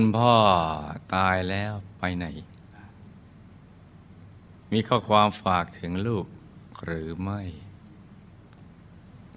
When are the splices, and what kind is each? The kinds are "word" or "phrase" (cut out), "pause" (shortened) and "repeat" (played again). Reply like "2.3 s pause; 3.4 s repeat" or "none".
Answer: 4.6 s pause

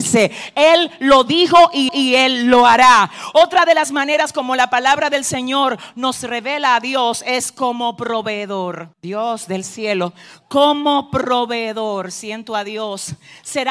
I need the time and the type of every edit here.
1.9 s repeat; 8.9 s pause

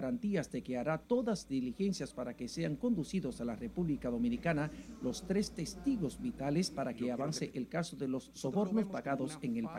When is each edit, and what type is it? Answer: 1.4 s word

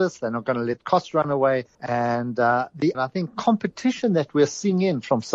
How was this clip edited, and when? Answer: 1.7 s pause; 2.9 s phrase

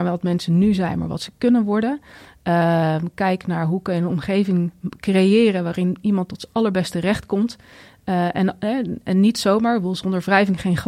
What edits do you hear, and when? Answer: none

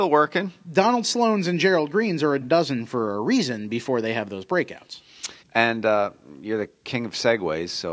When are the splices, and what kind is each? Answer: 2.4 s word; 5.4 s pause

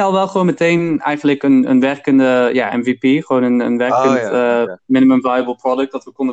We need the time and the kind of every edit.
4.8 s pause

